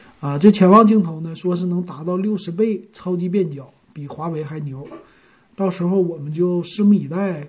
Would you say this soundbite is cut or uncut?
uncut